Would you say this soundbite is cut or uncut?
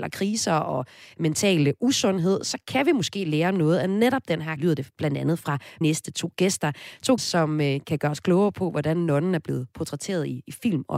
cut